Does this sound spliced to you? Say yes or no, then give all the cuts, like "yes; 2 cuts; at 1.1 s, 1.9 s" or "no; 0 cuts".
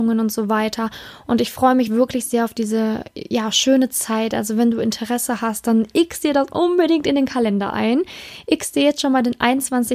no; 0 cuts